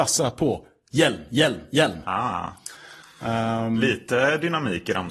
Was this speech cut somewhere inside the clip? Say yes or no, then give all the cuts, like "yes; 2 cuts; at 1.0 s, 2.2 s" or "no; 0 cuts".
no; 0 cuts